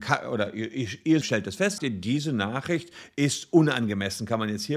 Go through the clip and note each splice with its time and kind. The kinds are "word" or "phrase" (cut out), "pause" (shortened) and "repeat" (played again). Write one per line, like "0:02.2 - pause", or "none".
0:01.2 - word
0:01.8 - word